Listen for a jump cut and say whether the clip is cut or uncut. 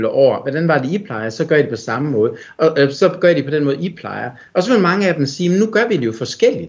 uncut